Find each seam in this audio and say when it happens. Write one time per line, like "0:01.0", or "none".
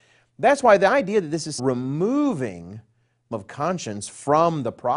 0:01.6
0:03.3